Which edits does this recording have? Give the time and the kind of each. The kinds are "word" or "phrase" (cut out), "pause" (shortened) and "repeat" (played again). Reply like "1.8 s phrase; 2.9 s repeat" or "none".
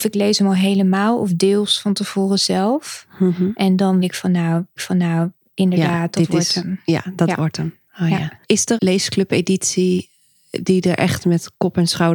4.0 s word; 4.8 s repeat; 8.4 s pause; 8.8 s word